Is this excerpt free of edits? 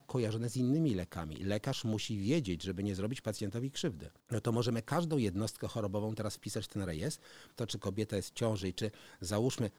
no; 2 cuts; at 4.2 s, 7.6 s

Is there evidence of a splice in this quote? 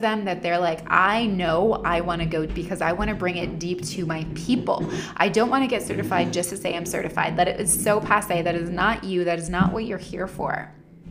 yes; 1 cut; at 2.5 s

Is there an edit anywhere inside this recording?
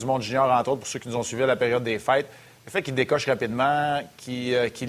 no; 0 cuts

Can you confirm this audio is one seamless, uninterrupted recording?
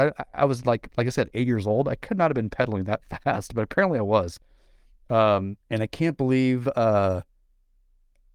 no; 1 cut; at 5.6 s

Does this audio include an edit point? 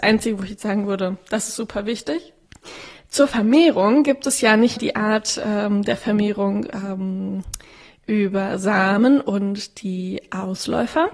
yes; 1 cut; at 4.8 s

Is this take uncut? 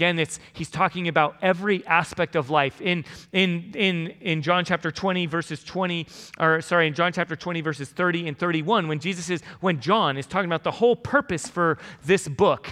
yes; 0 cuts

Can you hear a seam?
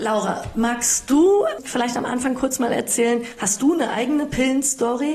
no; 0 cuts

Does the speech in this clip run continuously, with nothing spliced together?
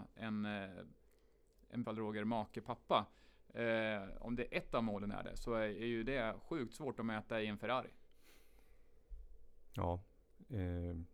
no; 1 cut; at 1.8 s

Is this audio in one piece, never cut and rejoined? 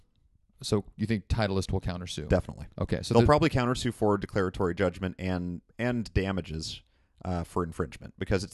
no; 3 cuts; at 2.7 s, 5.7 s, 6.9 s

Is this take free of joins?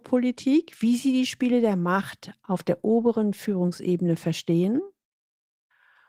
yes; 0 cuts

